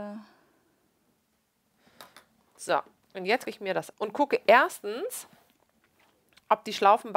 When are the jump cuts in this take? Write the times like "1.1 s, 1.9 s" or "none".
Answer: 3.4 s, 3.9 s